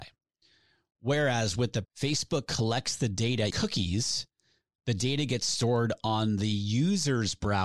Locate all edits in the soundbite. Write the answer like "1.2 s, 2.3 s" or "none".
1.8 s, 3.5 s